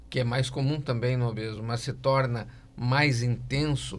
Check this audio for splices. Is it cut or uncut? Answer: uncut